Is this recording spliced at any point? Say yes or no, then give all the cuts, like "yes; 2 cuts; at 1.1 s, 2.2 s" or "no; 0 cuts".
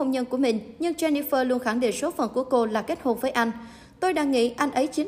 no; 0 cuts